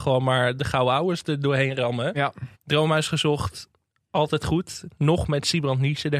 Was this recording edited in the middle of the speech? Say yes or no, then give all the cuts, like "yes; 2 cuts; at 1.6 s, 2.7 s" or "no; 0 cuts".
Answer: yes; 1 cut; at 2.5 s